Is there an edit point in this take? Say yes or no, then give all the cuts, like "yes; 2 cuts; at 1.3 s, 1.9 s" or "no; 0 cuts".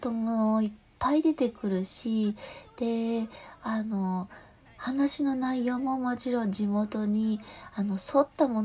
no; 0 cuts